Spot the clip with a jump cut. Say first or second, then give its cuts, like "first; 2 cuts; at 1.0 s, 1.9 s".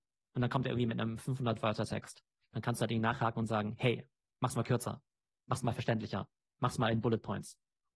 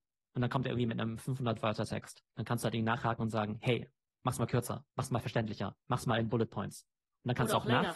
second; 3 cuts; at 2.3 s, 4.9 s, 5.8 s